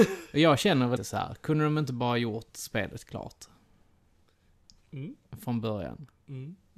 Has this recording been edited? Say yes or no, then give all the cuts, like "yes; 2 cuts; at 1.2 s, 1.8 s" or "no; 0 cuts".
yes; 1 cut; at 1.0 s